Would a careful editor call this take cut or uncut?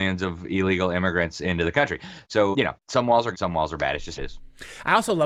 cut